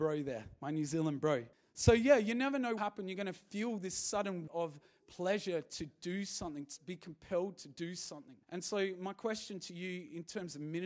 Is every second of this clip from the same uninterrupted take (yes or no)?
no